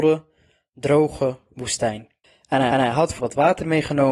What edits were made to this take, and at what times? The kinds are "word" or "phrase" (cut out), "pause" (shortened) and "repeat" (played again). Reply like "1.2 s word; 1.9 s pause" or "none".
2.2 s pause; 2.7 s repeat; 3.2 s word